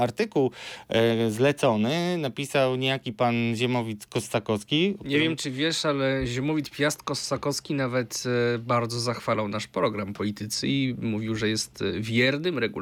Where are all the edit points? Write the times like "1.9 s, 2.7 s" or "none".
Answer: 10.1 s